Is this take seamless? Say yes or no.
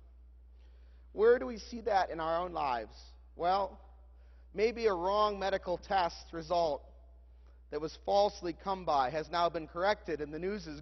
yes